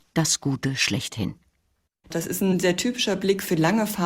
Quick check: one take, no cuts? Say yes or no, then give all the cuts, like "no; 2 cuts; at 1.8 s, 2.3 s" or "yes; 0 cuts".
yes; 0 cuts